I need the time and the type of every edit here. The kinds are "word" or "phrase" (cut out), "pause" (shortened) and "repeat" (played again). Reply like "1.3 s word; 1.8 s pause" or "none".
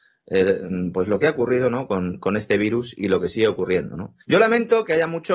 4.2 s pause